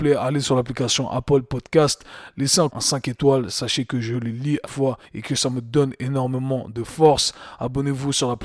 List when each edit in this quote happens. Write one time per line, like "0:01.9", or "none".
0:02.7
0:04.6
0:05.0